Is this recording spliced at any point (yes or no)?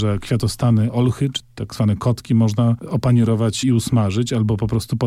yes